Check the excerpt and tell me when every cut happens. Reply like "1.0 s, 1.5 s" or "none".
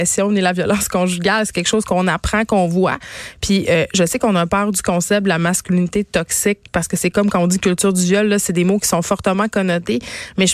none